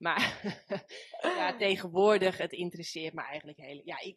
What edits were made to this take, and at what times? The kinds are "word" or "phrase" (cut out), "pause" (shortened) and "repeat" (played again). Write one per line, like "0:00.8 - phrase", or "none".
none